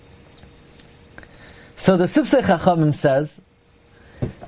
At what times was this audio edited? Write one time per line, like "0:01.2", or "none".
none